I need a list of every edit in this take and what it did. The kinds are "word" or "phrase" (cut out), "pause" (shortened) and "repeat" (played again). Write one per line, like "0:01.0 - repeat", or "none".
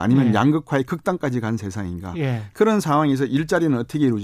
none